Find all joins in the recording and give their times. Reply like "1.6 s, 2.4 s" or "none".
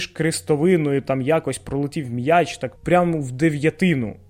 2.8 s

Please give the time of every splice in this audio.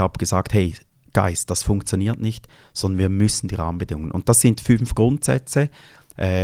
none

